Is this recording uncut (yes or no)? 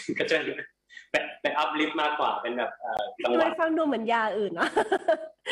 yes